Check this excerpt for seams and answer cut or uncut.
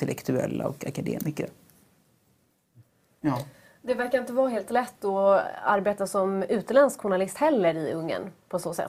uncut